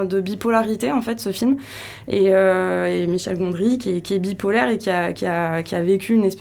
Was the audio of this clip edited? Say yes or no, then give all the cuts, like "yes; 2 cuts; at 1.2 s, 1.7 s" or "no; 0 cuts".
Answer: no; 0 cuts